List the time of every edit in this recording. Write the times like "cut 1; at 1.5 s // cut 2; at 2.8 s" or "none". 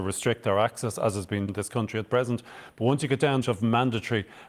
cut 1; at 1.5 s // cut 2; at 3.4 s